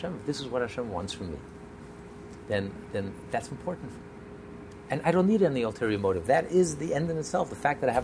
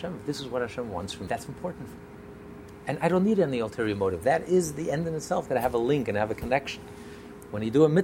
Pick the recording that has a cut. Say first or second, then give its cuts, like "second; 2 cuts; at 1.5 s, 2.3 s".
second; 2 cuts; at 1.3 s, 5.5 s